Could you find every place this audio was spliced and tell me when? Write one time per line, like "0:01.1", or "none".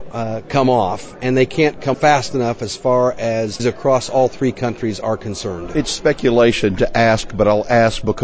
0:01.9
0:03.6